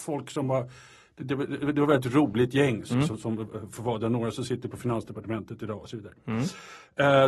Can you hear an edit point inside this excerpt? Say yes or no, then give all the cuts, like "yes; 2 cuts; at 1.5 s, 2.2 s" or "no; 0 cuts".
no; 0 cuts